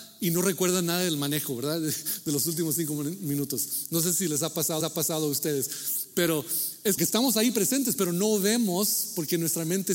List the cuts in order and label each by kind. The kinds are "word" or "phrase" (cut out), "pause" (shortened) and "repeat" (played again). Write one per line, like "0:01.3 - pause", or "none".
0:04.8 - repeat
0:07.0 - word